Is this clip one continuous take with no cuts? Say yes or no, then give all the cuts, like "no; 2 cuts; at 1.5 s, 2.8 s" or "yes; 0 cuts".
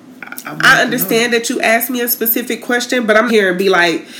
no; 1 cut; at 3.3 s